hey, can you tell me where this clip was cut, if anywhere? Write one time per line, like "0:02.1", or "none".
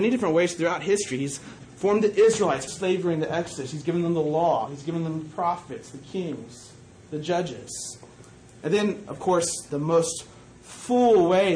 0:01.6
0:02.7
0:09.7